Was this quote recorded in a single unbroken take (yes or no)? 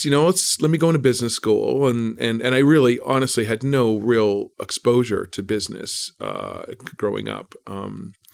no